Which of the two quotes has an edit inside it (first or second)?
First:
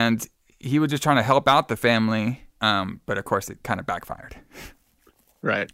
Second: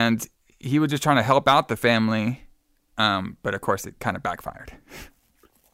first